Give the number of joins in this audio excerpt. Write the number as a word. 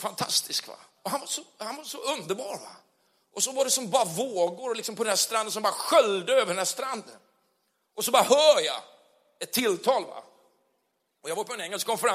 zero